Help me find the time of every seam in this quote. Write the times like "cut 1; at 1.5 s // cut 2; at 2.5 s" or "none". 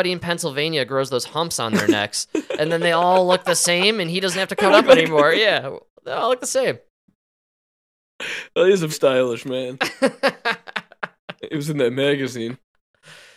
cut 1; at 4.7 s // cut 2; at 8.9 s